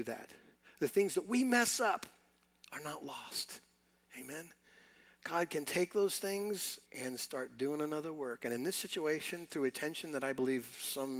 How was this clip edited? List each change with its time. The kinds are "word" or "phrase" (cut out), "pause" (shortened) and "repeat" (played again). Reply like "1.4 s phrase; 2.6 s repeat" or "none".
6.9 s pause

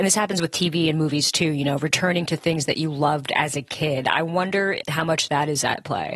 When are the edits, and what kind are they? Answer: none

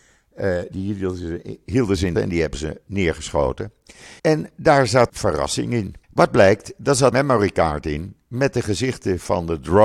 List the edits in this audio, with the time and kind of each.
2.1 s phrase; 4.2 s pause; 5.1 s word; 6.0 s pause; 7.1 s word

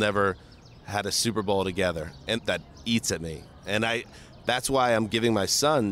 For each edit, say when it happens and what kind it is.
2.4 s word

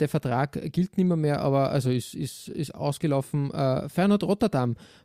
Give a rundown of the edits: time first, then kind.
none

